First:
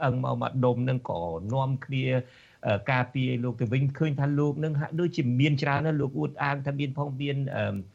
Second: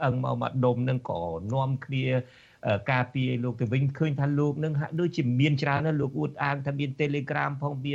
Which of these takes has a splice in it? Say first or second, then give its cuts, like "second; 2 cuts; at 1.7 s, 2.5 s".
first; 1 cut; at 6.9 s